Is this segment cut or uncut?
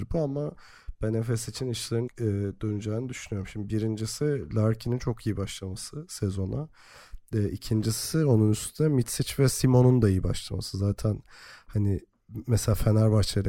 cut